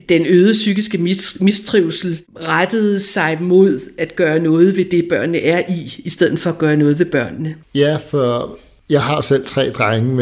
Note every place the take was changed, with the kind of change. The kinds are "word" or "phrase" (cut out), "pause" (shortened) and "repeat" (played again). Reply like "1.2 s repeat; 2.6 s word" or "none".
none